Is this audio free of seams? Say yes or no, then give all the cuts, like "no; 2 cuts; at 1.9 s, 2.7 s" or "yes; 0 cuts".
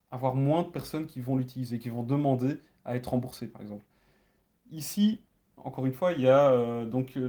yes; 0 cuts